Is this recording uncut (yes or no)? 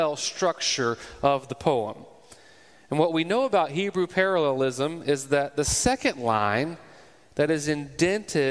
yes